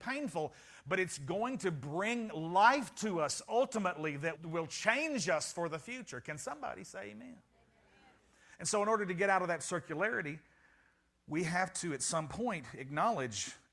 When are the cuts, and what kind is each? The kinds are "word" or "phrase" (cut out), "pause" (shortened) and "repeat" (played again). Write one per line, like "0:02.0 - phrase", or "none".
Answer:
0:04.3 - word